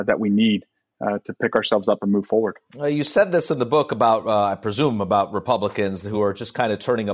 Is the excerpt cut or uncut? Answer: uncut